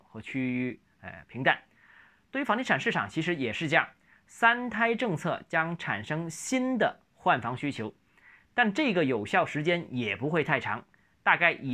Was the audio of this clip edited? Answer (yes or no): no